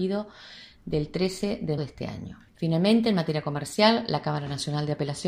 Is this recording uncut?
no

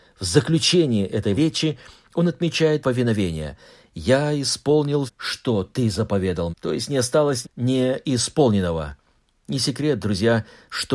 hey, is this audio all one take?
no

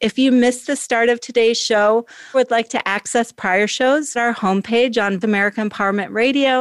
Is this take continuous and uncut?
no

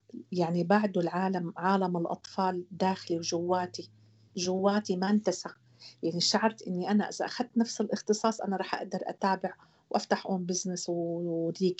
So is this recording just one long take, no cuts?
yes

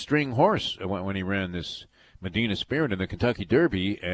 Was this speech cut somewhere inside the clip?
no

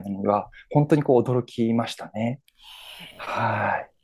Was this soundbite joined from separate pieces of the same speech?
yes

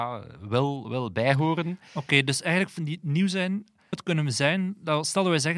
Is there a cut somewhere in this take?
yes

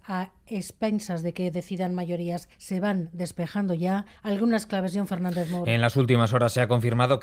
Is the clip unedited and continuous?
no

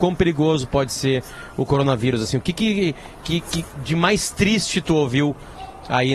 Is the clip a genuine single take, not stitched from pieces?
yes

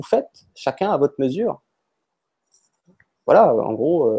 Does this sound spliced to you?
no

